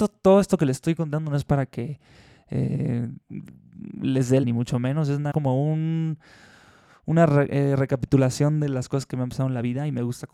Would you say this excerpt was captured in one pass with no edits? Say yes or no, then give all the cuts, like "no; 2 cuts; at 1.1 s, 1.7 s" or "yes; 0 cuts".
no; 2 cuts; at 4.4 s, 5.3 s